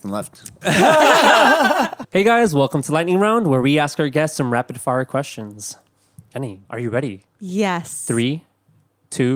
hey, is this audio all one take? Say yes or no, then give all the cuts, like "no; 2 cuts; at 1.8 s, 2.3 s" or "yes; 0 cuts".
no; 2 cuts; at 6.6 s, 7.3 s